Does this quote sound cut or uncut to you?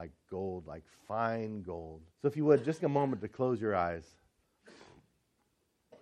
cut